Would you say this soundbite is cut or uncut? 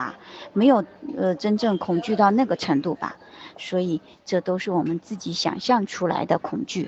uncut